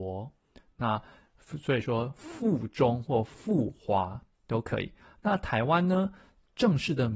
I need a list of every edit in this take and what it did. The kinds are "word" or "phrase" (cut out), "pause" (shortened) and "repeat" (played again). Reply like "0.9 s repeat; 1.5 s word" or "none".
none